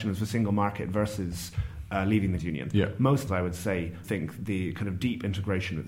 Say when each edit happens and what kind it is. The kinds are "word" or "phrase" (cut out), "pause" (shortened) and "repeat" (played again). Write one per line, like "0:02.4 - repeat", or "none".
0:02.4 - word
0:03.3 - word
0:04.0 - word